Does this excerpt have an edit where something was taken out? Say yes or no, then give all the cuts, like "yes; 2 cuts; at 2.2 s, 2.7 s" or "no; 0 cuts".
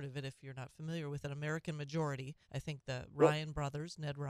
yes; 1 cut; at 2.4 s